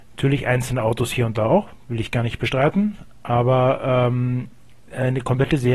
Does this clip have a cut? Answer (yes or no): no